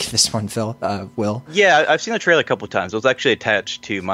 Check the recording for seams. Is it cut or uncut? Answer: uncut